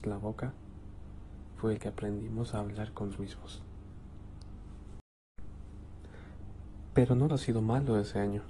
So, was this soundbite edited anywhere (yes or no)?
yes